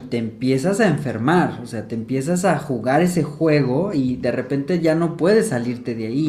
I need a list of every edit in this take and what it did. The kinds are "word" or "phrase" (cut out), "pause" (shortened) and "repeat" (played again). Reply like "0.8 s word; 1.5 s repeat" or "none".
none

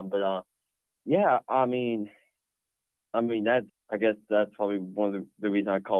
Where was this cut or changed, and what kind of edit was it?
3.1 s phrase; 3.7 s word

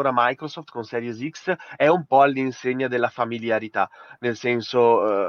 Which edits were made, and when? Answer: none

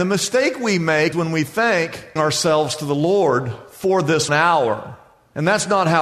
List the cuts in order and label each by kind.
1.1 s word; 2.2 s phrase; 4.3 s word

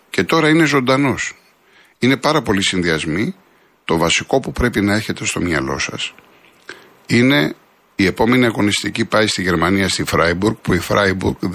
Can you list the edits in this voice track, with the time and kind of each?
none

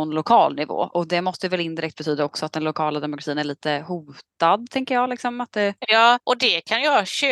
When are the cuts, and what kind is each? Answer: 6.2 s pause

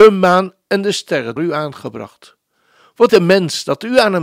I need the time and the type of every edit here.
1.4 s word; 3.1 s word

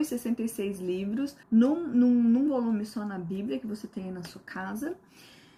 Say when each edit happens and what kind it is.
1.4 s pause

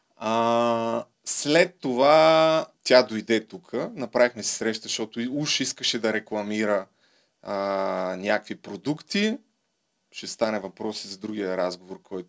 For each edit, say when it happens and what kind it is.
1.1 s pause; 2.7 s pause

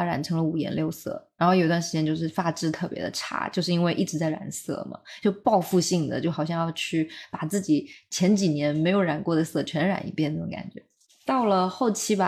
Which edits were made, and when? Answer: none

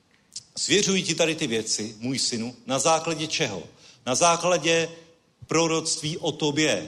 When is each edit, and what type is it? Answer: none

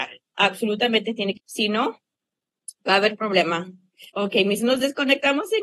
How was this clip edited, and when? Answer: 1.4 s word; 4.1 s pause; 4.6 s word

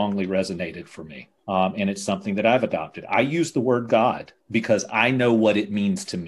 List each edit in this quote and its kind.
1.4 s pause

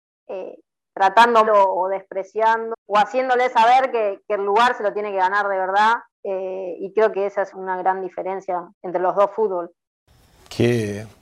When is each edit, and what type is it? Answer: 1.5 s word; 2.7 s word; 6.1 s pause; 7.1 s word; 7.5 s word; 8.7 s pause

